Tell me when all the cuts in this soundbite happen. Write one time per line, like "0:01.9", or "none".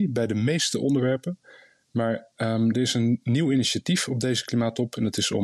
none